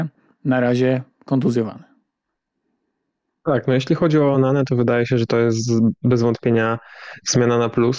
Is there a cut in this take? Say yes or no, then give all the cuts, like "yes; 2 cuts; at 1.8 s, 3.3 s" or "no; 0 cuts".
no; 0 cuts